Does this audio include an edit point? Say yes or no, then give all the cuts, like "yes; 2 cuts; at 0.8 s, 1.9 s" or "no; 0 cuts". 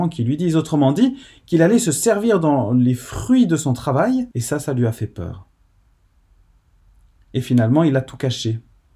yes; 1 cut; at 4.3 s